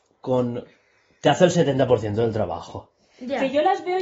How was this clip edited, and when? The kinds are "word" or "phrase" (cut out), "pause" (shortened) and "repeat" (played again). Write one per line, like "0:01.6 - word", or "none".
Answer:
none